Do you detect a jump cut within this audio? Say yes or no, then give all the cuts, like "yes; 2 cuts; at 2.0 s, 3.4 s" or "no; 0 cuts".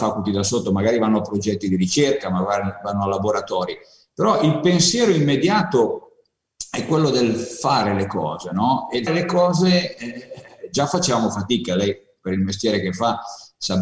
yes; 1 cut; at 9.1 s